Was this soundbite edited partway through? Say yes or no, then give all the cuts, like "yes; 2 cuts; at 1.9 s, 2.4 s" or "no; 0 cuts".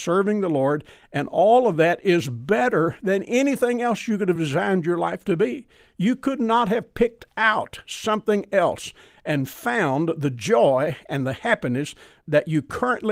no; 0 cuts